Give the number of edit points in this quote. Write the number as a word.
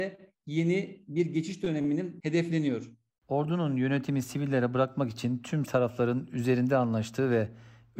two